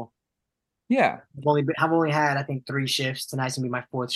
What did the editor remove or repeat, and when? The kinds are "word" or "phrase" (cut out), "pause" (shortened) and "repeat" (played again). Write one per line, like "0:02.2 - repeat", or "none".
none

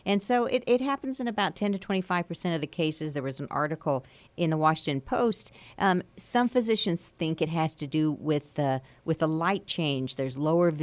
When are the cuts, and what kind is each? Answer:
none

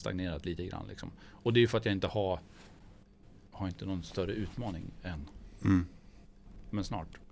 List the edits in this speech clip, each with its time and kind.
none

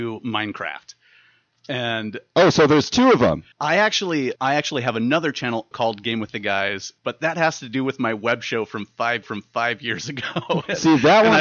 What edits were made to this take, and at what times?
0:03.5 - pause
0:04.4 - word
0:05.7 - word
0:07.0 - pause
0:09.2 - repeat

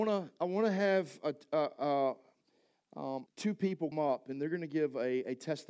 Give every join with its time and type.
0:03.3 - word
0:03.9 - word

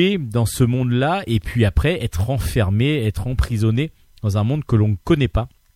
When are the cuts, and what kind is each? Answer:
none

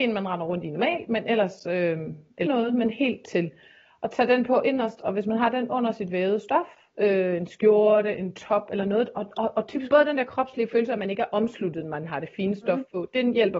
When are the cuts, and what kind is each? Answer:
0:02.5 - word
0:09.9 - phrase

